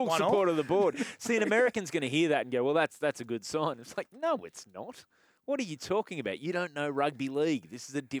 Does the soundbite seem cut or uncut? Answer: uncut